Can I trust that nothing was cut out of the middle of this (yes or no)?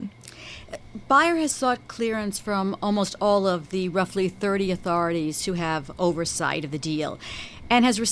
yes